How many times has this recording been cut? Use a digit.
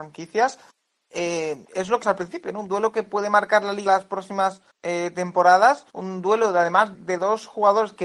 6